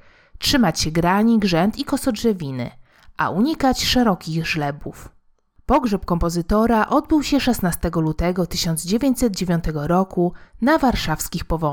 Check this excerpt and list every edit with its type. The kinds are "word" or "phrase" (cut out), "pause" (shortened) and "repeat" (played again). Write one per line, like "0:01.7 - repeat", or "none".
none